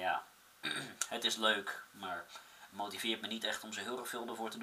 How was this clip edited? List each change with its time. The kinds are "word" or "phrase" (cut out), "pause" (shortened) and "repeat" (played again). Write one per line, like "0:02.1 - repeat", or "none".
none